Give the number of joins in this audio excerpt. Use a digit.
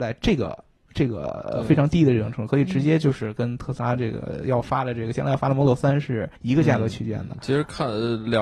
1